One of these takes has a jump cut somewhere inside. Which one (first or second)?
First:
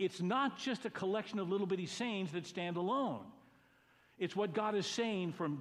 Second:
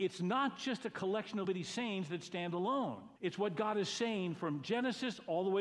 second